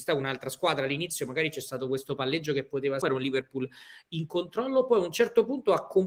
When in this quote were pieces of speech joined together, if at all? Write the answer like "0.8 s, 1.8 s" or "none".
3.0 s